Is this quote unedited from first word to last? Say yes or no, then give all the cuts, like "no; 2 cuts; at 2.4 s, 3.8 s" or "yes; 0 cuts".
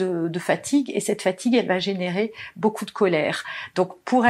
yes; 0 cuts